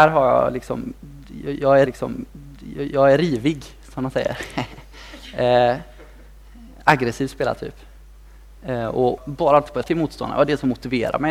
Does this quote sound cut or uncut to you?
cut